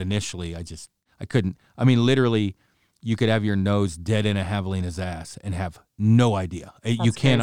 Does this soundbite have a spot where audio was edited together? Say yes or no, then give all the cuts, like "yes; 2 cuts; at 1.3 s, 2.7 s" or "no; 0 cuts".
no; 0 cuts